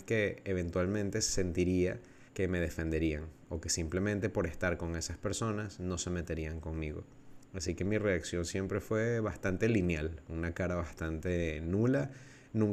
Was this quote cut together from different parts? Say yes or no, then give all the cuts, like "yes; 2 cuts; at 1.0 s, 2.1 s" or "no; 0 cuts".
yes; 1 cut; at 2.3 s